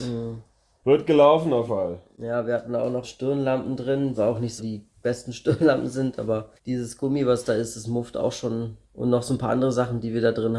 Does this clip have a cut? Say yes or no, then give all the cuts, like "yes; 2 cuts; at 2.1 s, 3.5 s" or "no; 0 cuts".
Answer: yes; 6 cuts; at 1.7 s, 3.0 s, 4.1 s, 4.6 s, 6.6 s, 8.8 s